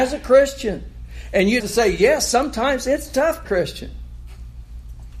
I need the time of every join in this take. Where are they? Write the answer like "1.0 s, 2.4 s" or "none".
1.6 s, 3.4 s